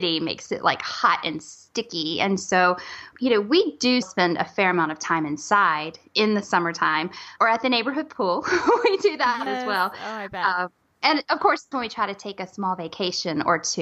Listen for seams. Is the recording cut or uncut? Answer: cut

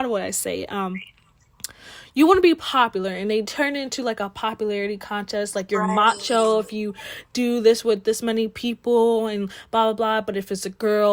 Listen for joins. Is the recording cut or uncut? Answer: uncut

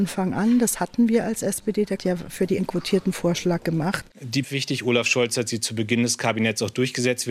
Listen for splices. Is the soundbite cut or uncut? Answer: cut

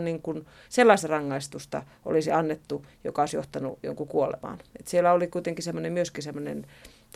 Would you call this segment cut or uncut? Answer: uncut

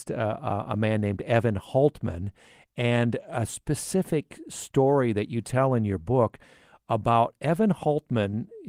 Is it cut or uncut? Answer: uncut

